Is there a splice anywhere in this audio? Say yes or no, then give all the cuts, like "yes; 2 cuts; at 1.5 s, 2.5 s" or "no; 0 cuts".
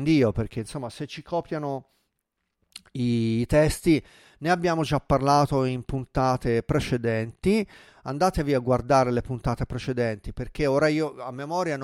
no; 0 cuts